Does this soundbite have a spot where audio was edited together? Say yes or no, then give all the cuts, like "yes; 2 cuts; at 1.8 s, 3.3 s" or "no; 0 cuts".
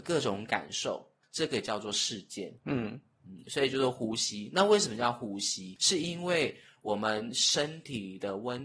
no; 0 cuts